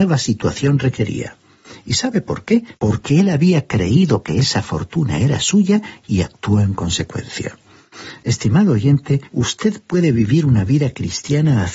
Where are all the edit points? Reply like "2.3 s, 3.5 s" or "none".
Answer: 2.7 s, 9.3 s